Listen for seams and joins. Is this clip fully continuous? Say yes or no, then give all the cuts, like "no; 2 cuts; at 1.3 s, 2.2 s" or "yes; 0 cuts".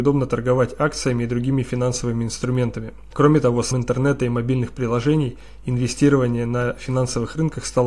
no; 1 cut; at 3.7 s